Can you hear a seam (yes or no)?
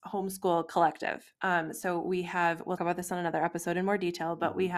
yes